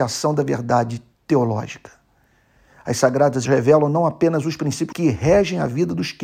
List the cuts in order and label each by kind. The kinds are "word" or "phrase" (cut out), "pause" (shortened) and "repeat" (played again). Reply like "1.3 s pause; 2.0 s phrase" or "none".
1.1 s pause; 3.4 s word; 4.9 s word